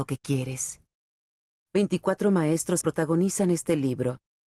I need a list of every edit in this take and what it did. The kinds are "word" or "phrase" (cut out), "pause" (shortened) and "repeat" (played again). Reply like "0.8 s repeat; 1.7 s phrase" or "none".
2.8 s word